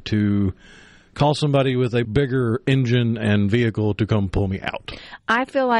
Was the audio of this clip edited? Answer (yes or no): yes